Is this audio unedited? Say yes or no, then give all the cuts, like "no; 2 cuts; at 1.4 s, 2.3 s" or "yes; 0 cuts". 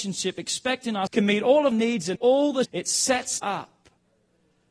no; 5 cuts; at 1.1 s, 1.7 s, 2.2 s, 2.6 s, 3.4 s